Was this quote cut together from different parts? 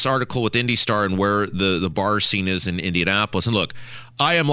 no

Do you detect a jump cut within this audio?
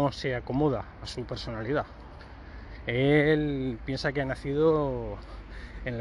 no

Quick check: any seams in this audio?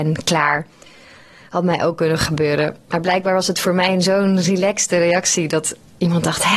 no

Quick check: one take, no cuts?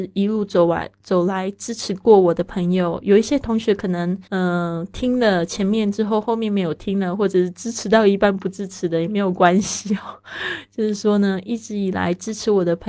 no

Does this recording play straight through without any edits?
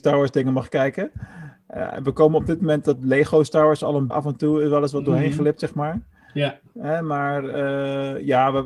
no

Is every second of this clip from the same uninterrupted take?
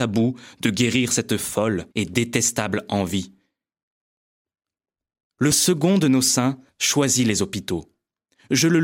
no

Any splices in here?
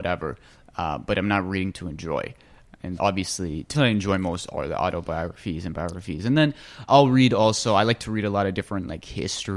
yes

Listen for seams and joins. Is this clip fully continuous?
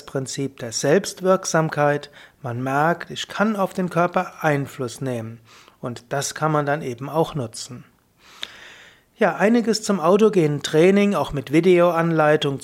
yes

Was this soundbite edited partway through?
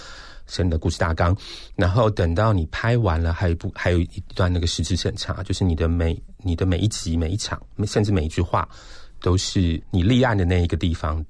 no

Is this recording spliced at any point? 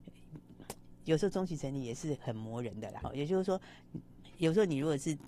yes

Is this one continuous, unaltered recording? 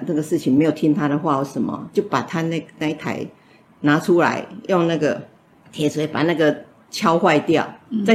yes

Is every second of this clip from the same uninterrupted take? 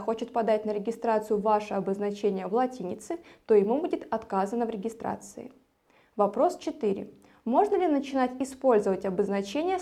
yes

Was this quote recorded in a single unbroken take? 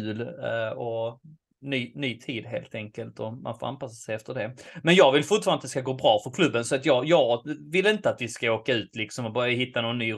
yes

